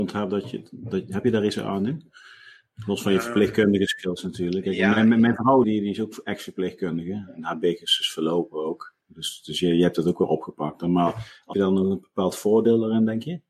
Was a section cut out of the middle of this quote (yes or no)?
yes